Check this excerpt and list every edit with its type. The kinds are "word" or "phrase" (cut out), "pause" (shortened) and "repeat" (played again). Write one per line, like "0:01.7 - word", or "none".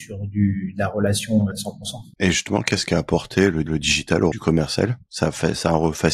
0:01.5 - phrase
0:02.2 - pause
0:03.7 - repeat
0:04.3 - word